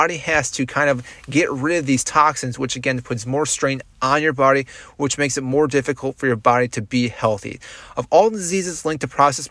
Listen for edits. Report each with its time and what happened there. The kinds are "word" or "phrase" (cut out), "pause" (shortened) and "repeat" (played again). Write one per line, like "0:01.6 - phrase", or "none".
none